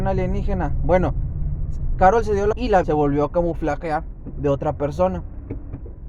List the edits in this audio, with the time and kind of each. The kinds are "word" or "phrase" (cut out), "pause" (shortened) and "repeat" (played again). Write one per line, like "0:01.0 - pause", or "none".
0:02.5 - word
0:02.8 - word